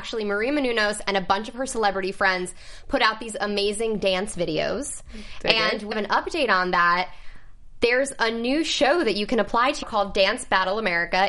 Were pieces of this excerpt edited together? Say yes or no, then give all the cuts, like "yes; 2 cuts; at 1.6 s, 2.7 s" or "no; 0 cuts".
yes; 2 cuts; at 5.9 s, 9.8 s